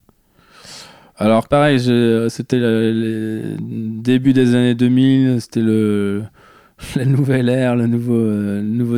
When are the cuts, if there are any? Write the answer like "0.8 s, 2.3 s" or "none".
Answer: none

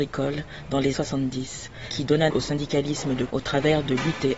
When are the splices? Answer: 0.9 s, 2.3 s, 3.3 s

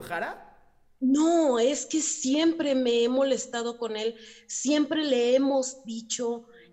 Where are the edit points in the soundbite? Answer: none

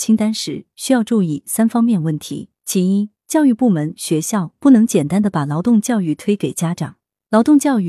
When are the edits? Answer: 2.5 s

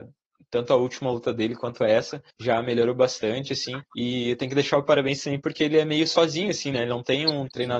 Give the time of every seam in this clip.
2.3 s, 3.9 s

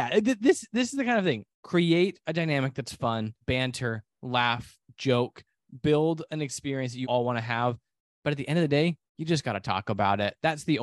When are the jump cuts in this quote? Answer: 1.5 s, 3.4 s, 7.0 s, 9.1 s

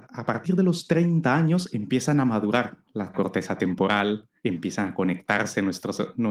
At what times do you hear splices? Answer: 3.1 s, 4.4 s

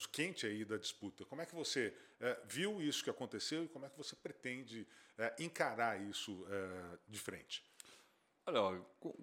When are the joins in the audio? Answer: none

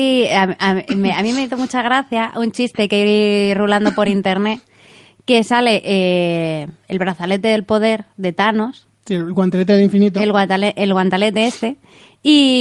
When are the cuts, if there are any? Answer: none

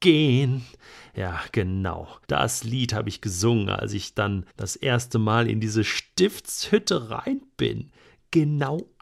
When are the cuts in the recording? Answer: 2.2 s, 4.5 s

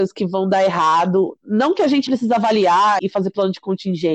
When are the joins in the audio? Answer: 2.1 s, 3.0 s

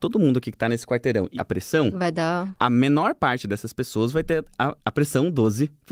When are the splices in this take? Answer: 1.4 s

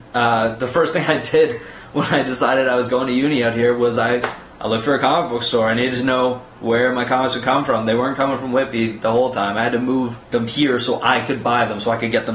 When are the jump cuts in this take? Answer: 10.2 s

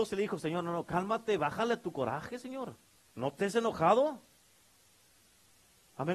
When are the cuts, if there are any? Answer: 1.4 s, 2.8 s

